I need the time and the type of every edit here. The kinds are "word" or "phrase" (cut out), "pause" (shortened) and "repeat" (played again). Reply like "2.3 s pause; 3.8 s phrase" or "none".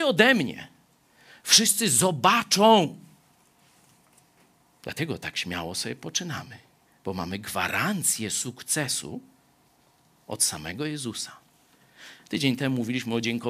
none